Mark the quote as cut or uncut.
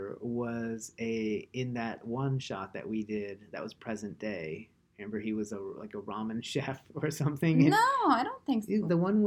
uncut